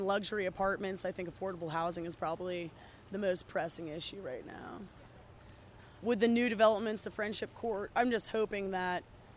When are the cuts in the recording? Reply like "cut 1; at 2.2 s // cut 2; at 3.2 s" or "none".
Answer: none

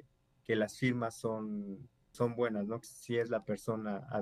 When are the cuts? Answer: cut 1; at 2.1 s // cut 2; at 2.8 s

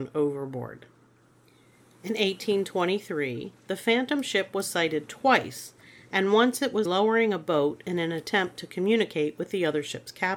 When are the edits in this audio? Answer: cut 1; at 6.8 s

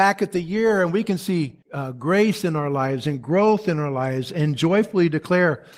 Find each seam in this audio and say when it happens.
cut 1; at 1.6 s

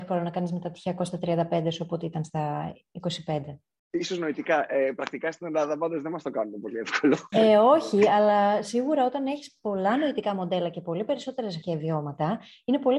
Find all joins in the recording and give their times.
cut 1; at 11.6 s

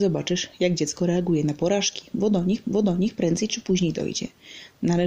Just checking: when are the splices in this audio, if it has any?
cut 1; at 2.6 s

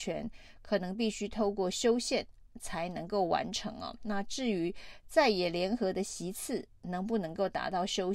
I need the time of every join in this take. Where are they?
none

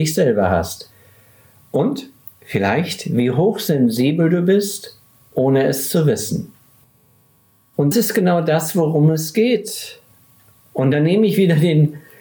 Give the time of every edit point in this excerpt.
cut 1; at 2.4 s // cut 2; at 7.9 s

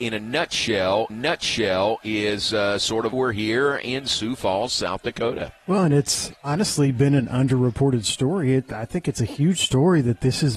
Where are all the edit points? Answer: cut 1; at 1.1 s // cut 2; at 3.1 s // cut 3; at 5.6 s // cut 4; at 6.4 s

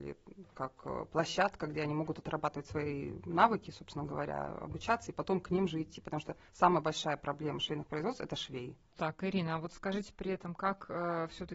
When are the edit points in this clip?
none

